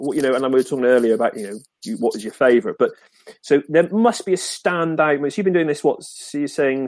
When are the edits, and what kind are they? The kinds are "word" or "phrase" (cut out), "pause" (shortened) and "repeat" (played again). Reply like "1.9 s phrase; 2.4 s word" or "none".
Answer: none